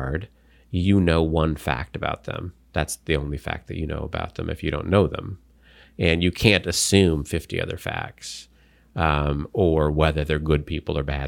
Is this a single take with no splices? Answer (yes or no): yes